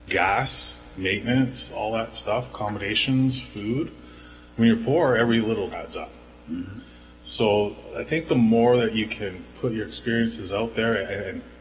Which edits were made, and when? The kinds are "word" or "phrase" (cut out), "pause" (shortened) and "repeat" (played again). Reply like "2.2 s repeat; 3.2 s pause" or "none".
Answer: 2.5 s word; 5.7 s word

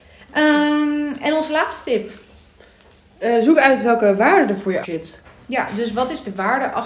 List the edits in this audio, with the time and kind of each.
4.8 s word

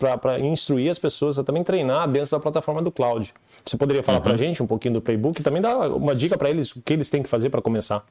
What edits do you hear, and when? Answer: none

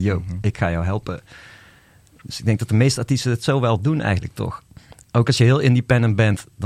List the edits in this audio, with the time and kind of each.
none

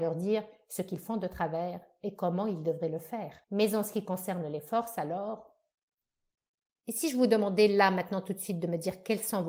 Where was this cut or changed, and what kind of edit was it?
3.4 s pause

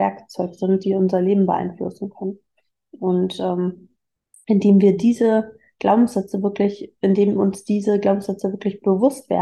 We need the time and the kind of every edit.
none

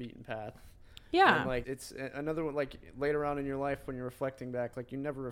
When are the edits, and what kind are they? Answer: 1.6 s word

